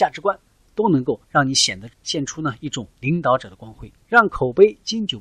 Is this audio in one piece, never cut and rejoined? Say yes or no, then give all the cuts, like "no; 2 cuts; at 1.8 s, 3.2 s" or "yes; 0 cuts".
no; 4 cuts; at 1.2 s, 1.9 s, 2.9 s, 4.0 s